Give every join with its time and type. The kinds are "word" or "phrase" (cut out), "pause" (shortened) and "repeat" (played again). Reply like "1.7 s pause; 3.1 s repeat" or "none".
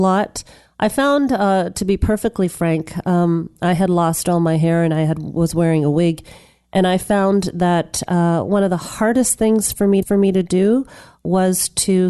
10.0 s repeat